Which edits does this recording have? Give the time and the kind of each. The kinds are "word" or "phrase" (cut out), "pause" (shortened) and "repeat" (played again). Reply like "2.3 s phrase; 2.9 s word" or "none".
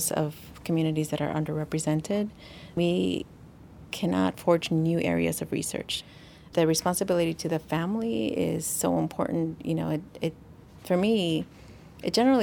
2.8 s word